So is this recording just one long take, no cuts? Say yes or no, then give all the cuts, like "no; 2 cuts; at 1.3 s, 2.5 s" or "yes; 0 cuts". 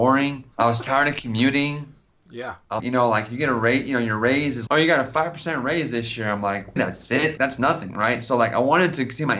no; 4 cuts; at 2.8 s, 4.7 s, 6.8 s, 7.4 s